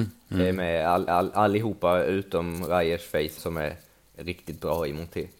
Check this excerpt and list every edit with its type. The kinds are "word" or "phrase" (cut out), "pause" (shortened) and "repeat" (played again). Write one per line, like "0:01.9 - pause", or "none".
0:01.1 - repeat
0:03.4 - phrase